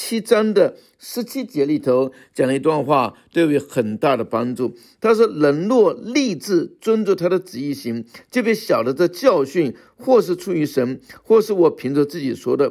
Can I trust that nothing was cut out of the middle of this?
yes; 0 cuts

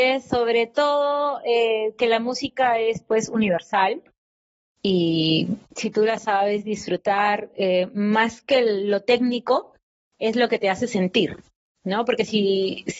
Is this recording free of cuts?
yes; 0 cuts

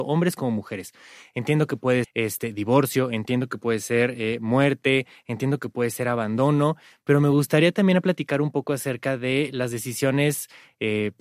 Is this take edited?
yes; 1 cut; at 2.0 s

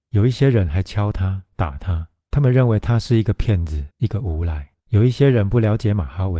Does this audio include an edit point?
yes; 4 cuts; at 1.5 s, 2.2 s, 3.9 s, 4.8 s

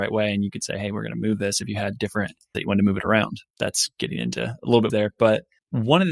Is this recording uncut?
no; 3 cuts; at 2.5 s, 3.5 s, 4.9 s

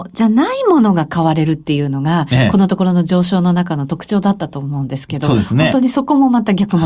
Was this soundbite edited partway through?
no; 0 cuts

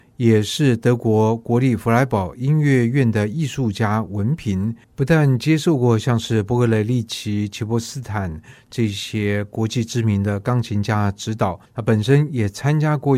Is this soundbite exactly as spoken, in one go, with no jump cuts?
no; 2 cuts; at 4.8 s, 11.7 s

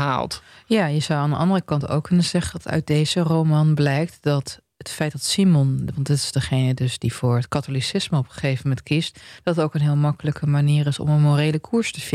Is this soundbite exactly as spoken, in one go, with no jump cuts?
yes; 0 cuts

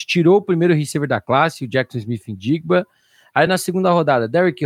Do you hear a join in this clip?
no; 0 cuts

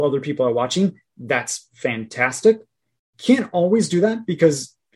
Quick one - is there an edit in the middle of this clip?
no; 0 cuts

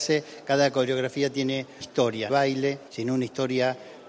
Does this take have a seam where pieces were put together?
yes; 3 cuts; at 1.8 s, 2.3 s, 2.9 s

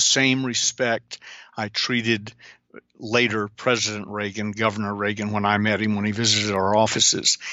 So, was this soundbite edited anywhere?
no; 0 cuts

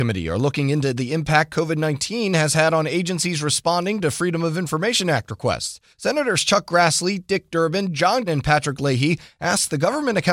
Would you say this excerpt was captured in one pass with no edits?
no; 2 cuts; at 5.9 s, 8.3 s

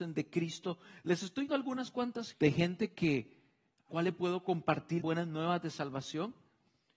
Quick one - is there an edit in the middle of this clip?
yes; 4 cuts; at 1.5 s, 2.3 s, 3.9 s, 5.0 s

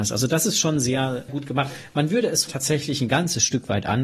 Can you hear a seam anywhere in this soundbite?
yes; 2 cuts; at 1.3 s, 2.5 s

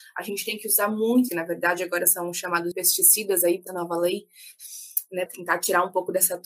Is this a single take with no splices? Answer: no; 4 cuts; at 1.3 s, 2.7 s, 3.7 s, 5.3 s

